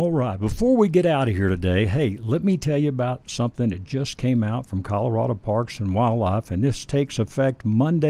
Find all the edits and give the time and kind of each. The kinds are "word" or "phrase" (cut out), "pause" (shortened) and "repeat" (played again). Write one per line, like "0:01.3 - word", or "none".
none